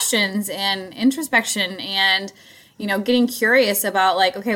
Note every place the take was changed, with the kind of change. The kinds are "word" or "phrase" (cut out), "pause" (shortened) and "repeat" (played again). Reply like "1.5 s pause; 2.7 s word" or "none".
none